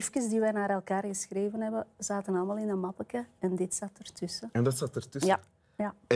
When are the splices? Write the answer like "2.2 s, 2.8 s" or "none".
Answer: none